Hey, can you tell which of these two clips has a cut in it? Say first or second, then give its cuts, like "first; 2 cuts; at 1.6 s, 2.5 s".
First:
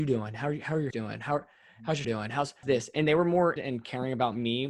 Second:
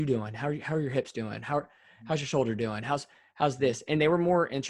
first; 4 cuts; at 0.9 s, 2.0 s, 2.6 s, 3.6 s